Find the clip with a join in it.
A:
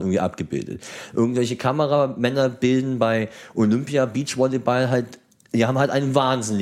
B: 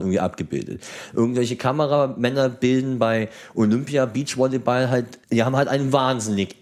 B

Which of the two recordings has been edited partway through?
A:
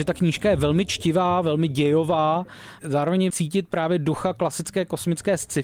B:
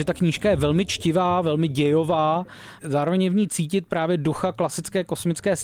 A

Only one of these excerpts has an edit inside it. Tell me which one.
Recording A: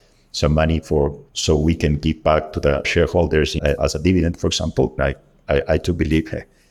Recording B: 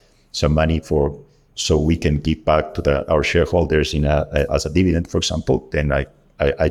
A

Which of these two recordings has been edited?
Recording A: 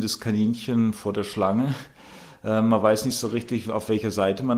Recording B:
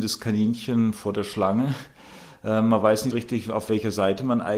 B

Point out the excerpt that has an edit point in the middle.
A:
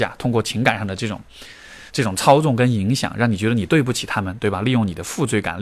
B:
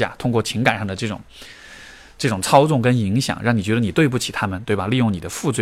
A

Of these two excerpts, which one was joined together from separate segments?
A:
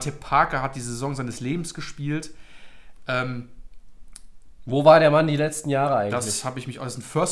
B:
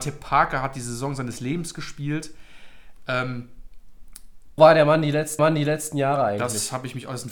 B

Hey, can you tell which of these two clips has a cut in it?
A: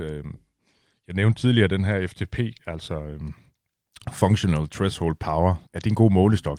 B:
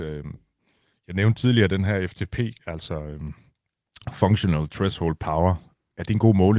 A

